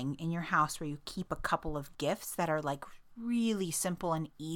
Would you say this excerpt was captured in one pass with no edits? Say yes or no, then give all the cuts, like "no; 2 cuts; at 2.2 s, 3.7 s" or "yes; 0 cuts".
yes; 0 cuts